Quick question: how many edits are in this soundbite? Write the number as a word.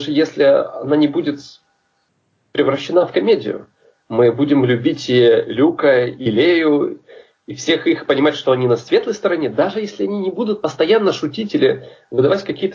zero